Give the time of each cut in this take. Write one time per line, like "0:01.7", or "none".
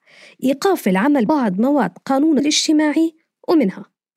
0:01.3
0:02.4

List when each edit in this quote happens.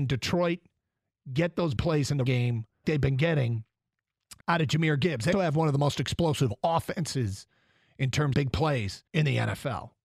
0:01.8
0:02.3
0:02.8
0:04.4
0:05.3
0:08.3
0:09.1

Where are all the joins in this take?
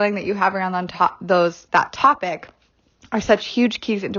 0:01.7

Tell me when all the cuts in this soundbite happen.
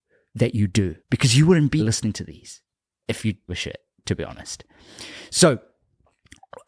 0:01.0
0:01.8
0:03.5

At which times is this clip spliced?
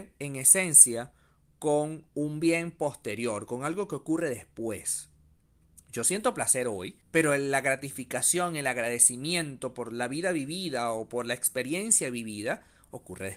0:07.0

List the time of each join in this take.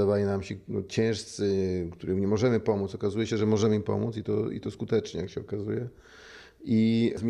none

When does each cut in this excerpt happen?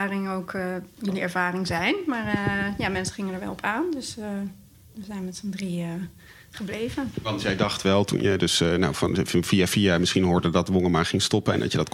none

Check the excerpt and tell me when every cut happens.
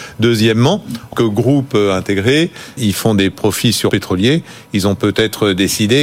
0:01.1
0:02.8
0:03.9

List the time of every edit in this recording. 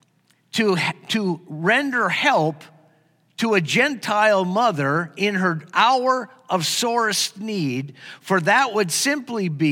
none

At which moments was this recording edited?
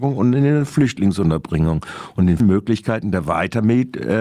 0:02.4

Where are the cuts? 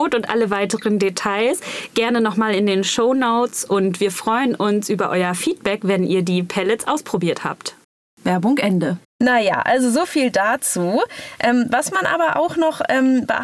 0:07.8
0:09.1

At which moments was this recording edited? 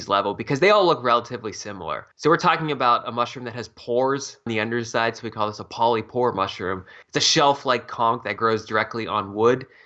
0:02.1
0:04.5
0:07.0

